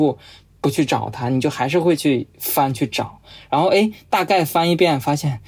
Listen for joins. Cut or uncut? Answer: uncut